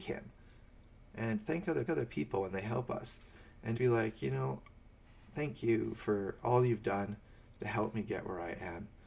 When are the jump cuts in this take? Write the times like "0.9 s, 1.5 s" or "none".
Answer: 1.9 s, 3.8 s

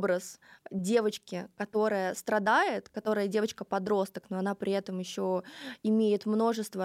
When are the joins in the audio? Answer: none

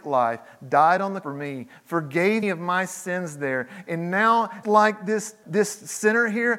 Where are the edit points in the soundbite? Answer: 1.2 s, 2.4 s, 4.6 s, 5.4 s

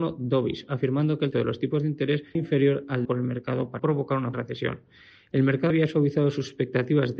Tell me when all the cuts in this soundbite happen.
1.3 s, 2.3 s, 3.0 s, 3.8 s, 4.3 s, 5.7 s

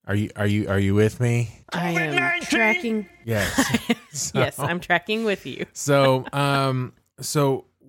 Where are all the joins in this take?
1.6 s

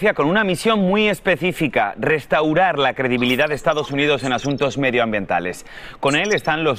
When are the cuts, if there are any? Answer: none

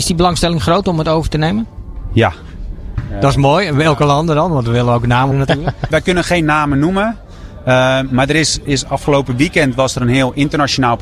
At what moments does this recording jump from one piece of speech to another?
5.3 s, 5.9 s, 8.7 s

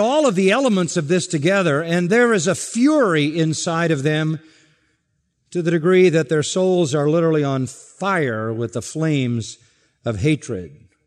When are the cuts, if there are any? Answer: none

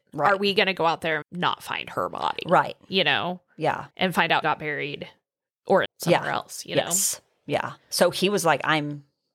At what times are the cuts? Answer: 1.2 s, 3.9 s, 4.4 s, 5.8 s, 7.8 s

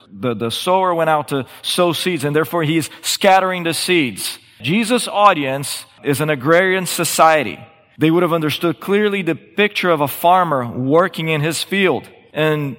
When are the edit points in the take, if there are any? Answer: none

